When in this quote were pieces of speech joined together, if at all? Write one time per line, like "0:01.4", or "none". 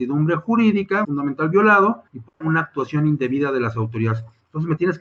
0:01.0
0:02.1
0:02.4